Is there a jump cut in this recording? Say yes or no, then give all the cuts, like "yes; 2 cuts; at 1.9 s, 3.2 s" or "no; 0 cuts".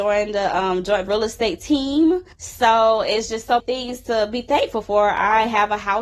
yes; 3 cuts; at 1.1 s, 2.3 s, 3.6 s